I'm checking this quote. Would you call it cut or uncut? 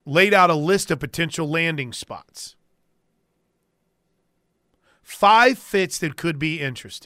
uncut